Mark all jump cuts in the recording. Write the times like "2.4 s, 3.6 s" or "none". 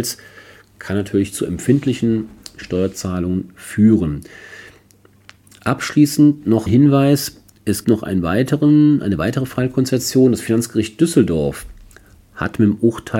6.7 s, 7.8 s